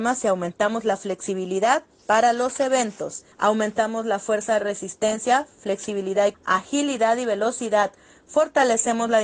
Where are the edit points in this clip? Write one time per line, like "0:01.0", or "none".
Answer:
0:03.3
0:06.3